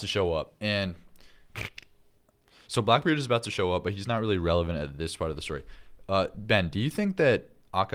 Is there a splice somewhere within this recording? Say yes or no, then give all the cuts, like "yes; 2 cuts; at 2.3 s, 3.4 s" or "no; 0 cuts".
no; 0 cuts